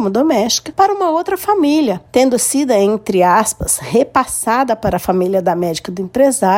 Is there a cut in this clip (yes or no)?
no